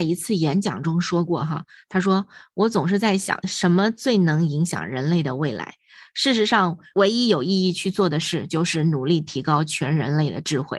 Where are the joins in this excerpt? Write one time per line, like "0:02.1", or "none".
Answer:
none

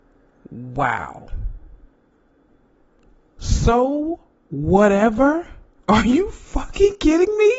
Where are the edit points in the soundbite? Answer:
none

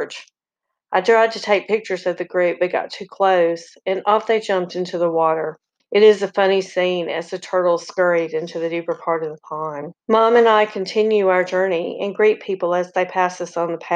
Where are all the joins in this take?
0:05.8
0:10.0

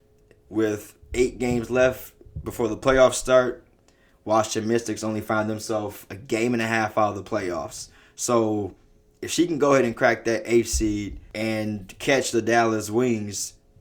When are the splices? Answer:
none

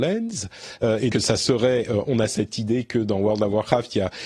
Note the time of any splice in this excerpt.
0:01.1
0:02.3

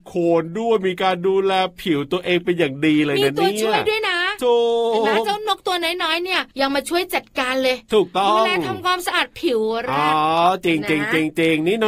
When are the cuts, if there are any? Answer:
0:06.5

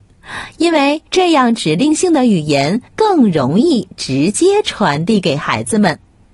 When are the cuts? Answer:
0:01.1
0:02.9

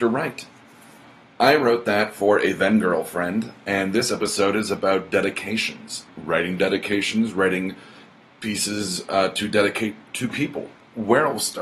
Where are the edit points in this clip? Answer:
none

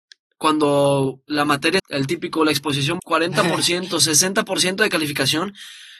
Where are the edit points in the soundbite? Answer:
0:01.8
0:03.0

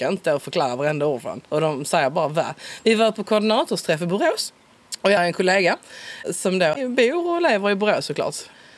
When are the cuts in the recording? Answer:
0:01.4
0:05.2

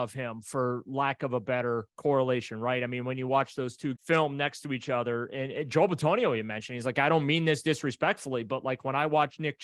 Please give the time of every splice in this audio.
0:01.9
0:04.0

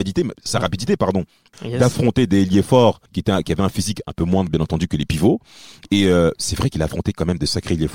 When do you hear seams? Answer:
0:01.5
0:03.1

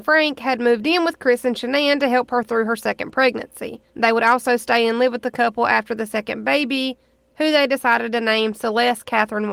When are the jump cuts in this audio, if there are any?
0:03.9

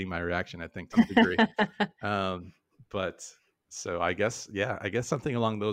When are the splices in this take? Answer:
0:00.9

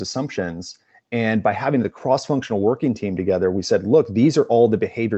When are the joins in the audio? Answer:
none

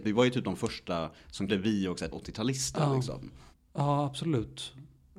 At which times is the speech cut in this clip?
0:01.5
0:02.1

